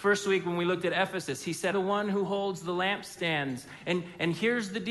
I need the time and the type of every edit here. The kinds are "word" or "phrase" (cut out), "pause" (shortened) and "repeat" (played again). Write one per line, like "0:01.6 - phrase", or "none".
0:01.7 - word